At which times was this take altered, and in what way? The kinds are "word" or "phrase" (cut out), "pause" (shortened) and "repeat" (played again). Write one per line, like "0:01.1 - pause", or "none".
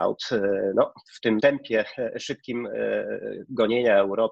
0:01.0 - pause
0:01.4 - word